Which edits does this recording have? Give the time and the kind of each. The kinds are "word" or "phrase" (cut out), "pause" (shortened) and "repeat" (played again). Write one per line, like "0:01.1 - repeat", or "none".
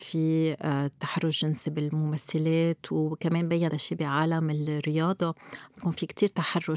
0:03.7 - word